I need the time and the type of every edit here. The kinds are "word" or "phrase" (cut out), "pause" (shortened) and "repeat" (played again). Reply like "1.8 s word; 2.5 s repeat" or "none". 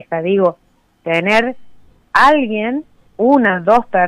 2.0 s word